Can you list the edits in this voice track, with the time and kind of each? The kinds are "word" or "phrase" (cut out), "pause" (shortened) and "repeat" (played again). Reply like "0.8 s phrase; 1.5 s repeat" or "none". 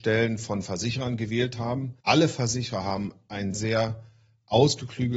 2.0 s pause; 3.5 s word